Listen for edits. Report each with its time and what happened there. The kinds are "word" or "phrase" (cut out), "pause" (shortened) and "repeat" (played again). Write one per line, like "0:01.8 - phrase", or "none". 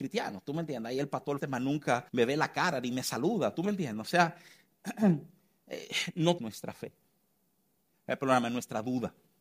0:01.4 - word
0:02.1 - pause
0:06.4 - word